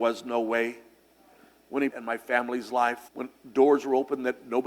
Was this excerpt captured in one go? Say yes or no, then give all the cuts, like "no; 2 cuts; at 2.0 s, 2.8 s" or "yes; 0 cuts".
no; 2 cuts; at 1.9 s, 3.1 s